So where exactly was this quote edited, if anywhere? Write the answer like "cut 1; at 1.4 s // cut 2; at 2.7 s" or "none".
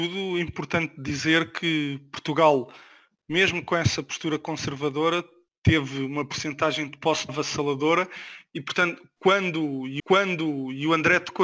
cut 1; at 7.3 s // cut 2; at 10.0 s